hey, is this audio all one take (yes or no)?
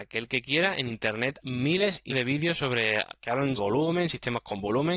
no